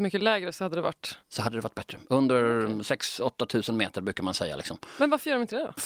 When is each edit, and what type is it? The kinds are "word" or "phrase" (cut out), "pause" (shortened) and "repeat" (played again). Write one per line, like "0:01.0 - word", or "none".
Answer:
0:01.2 - pause